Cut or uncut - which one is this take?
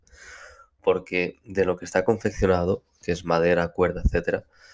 uncut